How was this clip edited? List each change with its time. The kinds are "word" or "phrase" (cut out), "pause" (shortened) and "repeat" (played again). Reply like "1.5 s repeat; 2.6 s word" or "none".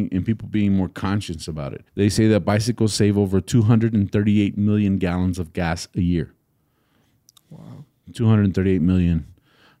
1.9 s pause